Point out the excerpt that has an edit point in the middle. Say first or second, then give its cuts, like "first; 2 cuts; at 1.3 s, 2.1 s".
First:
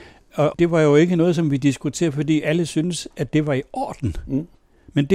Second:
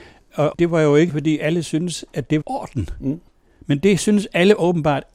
second; 2 cuts; at 1.1 s, 2.4 s